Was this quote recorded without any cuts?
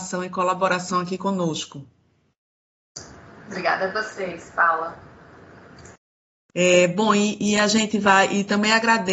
yes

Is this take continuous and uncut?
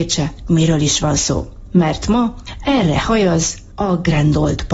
yes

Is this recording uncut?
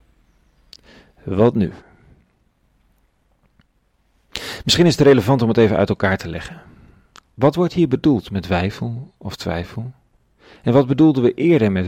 yes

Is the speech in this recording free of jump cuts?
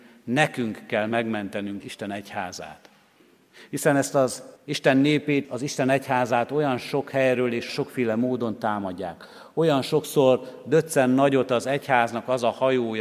no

